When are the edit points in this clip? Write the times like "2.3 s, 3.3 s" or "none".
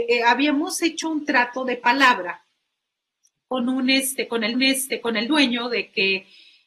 4.5 s